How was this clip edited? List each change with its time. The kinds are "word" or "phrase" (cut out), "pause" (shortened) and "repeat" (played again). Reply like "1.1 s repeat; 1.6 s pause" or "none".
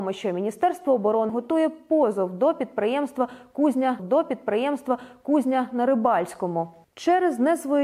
1.3 s word; 4.0 s repeat